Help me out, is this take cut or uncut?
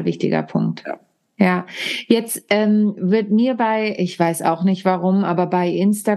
uncut